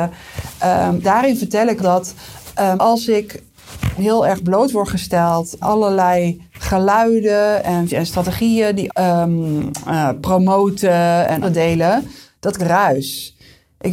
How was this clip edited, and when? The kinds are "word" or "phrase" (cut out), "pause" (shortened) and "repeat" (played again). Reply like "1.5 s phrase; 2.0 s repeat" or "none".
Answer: 1.0 s word; 1.8 s word; 2.8 s word; 4.0 s word; 5.6 s word; 7.9 s word; 8.9 s word; 11.4 s word; 12.6 s word